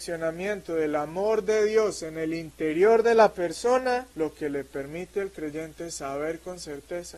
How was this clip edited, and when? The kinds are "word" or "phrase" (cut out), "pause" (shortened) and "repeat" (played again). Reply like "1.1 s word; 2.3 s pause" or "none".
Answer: 4.1 s pause